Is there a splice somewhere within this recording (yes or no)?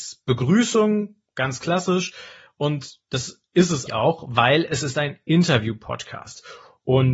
yes